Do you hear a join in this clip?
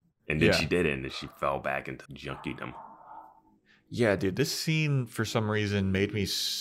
yes; 1 cut; at 2.1 s

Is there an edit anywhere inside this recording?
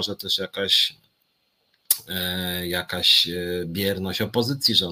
no; 0 cuts

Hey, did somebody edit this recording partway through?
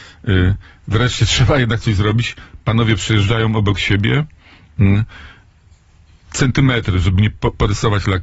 no; 0 cuts

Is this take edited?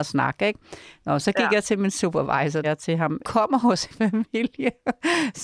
yes; 3 cuts; at 2.6 s, 3.2 s, 3.9 s

